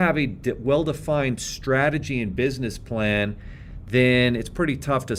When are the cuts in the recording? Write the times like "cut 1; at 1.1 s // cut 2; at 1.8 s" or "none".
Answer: none